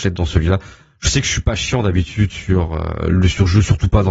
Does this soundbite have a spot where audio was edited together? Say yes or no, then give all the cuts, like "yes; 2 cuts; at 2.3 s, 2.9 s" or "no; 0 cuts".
no; 0 cuts